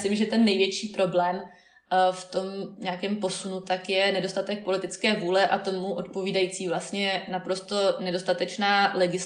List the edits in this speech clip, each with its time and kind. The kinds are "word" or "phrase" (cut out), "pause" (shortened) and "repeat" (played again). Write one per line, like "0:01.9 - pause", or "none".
none